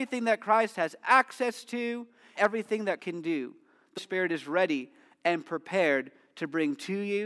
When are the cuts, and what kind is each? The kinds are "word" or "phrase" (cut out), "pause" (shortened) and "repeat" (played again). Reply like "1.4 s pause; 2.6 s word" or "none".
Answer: 2.4 s word; 3.0 s word; 4.0 s word